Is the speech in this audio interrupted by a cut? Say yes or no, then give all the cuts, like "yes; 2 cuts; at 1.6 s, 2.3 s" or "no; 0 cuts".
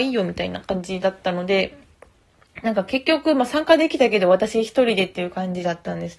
no; 0 cuts